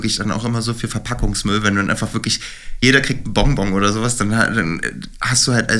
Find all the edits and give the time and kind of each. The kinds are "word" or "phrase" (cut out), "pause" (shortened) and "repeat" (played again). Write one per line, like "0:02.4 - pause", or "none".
none